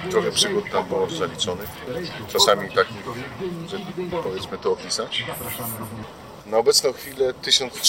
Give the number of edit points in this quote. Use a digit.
2